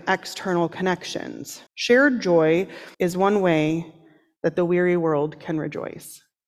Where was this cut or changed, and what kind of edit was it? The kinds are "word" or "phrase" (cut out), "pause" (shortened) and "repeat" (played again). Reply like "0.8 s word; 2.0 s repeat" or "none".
1.7 s pause; 2.9 s pause